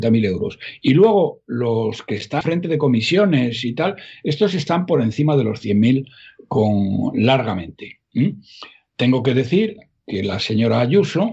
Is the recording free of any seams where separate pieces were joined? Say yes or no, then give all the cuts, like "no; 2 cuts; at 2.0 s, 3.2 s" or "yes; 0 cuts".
no; 1 cut; at 2.4 s